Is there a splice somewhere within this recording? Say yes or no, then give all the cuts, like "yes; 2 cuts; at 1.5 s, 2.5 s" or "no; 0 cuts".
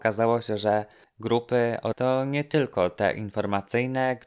yes; 2 cuts; at 1.0 s, 1.9 s